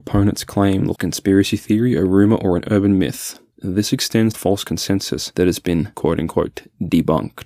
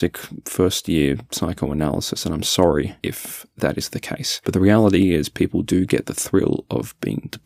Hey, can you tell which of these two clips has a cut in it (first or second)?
first